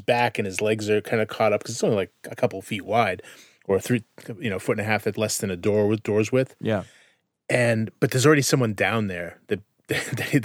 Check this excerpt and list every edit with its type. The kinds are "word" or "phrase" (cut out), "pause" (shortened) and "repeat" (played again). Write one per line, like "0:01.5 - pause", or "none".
0:05.1 - word